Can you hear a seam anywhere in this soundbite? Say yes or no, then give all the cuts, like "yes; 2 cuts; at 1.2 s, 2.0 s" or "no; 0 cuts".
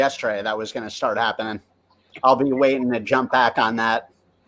no; 0 cuts